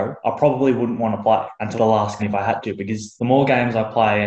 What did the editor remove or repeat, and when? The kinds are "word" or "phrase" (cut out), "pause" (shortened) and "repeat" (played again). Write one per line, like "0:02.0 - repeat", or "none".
0:01.8 - word
0:02.2 - word